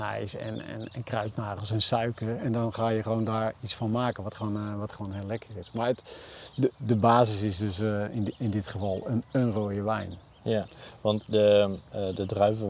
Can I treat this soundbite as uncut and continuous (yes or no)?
yes